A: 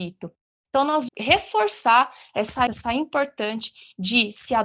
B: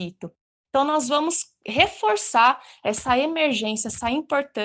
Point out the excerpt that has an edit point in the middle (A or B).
A